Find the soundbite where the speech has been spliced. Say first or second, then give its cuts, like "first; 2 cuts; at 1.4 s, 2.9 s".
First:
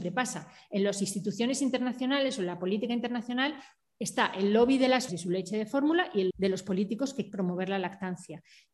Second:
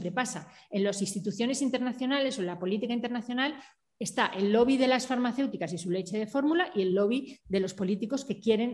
first; 3 cuts; at 5.1 s, 6.3 s, 7.3 s